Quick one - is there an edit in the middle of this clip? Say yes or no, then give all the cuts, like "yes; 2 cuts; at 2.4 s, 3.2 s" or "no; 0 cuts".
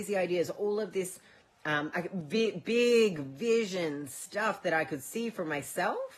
no; 0 cuts